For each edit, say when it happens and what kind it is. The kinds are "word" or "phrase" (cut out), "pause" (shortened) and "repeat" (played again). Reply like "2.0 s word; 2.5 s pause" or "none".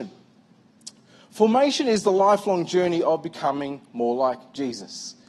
none